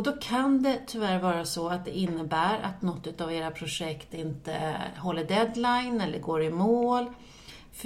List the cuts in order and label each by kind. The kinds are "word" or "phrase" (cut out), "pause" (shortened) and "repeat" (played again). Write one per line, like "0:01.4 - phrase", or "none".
none